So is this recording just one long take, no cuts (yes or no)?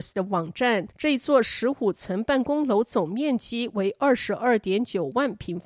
no